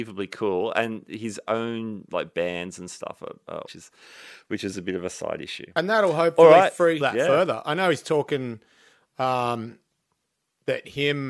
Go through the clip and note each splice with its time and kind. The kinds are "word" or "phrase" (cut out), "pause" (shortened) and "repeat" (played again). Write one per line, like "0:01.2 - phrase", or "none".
0:03.7 - phrase
0:07.0 - phrase

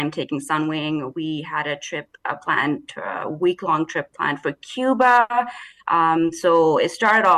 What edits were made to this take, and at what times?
none

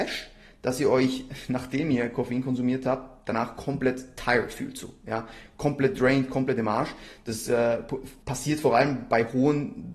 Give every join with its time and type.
0:08.2 - pause

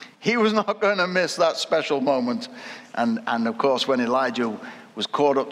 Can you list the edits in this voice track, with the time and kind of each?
none

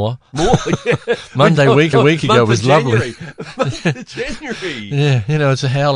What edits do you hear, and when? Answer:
0:01.9 - repeat

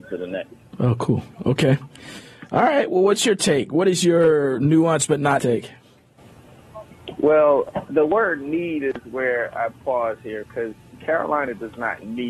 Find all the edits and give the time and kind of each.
0:05.4 - word
0:07.9 - word

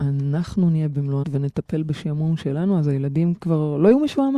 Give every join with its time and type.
0:01.2 - word

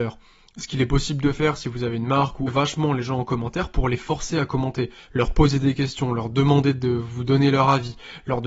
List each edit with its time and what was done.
0:02.5 - phrase

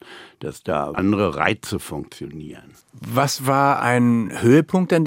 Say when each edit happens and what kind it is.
0:00.9 - word
0:02.8 - pause

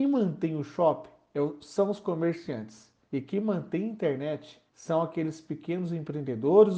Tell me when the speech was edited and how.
0:03.0 - pause
0:04.7 - pause

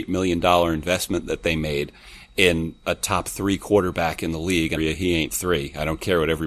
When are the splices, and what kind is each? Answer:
0:04.8 - phrase

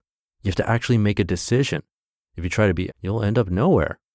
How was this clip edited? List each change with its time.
0:02.9 - word

